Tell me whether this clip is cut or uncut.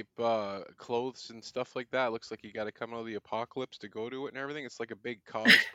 uncut